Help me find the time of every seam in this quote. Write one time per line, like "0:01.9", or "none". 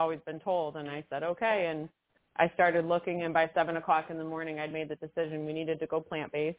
none